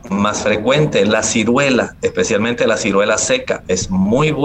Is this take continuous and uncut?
yes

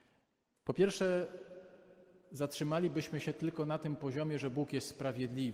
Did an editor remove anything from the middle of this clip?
no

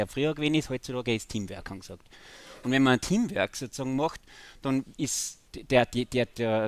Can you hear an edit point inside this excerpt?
yes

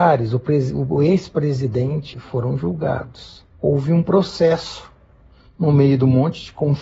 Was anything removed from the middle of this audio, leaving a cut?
yes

